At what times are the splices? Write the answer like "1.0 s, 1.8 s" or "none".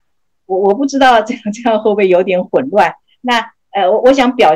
none

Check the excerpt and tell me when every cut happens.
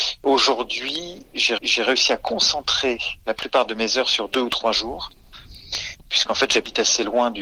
1.6 s, 3.2 s

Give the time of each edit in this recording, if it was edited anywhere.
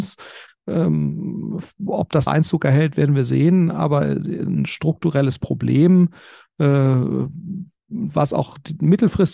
1.9 s, 2.3 s

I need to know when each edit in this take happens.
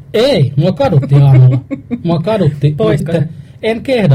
3.0 s

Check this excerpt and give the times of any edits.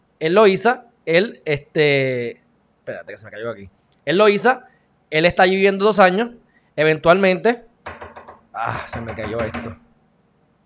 none

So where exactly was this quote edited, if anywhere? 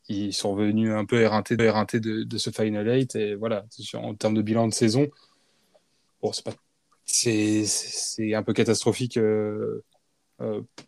1.6 s

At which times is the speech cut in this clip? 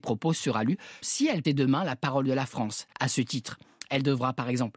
1.0 s, 1.4 s, 2.9 s

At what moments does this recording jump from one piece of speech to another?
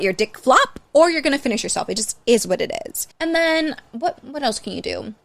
3.1 s

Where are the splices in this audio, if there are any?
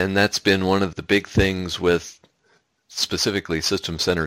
0.9 s

